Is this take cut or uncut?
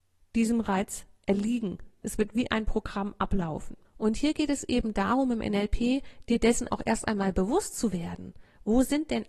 cut